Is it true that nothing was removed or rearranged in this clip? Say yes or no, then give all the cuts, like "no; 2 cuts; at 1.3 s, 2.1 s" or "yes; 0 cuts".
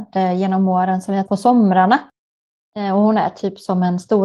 no; 1 cut; at 1.3 s